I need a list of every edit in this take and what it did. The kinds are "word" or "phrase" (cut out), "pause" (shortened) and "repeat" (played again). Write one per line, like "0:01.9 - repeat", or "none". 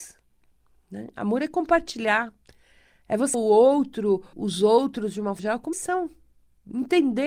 0:03.3 - word
0:04.3 - word
0:05.4 - word
0:05.7 - word